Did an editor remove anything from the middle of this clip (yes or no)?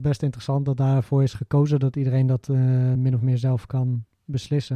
no